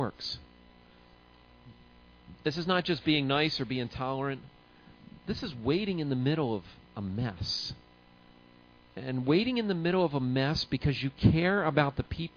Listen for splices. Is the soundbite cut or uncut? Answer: uncut